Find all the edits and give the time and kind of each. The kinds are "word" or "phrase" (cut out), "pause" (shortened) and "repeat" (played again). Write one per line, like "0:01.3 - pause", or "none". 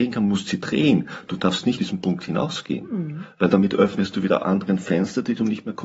0:01.8 - word
0:04.4 - word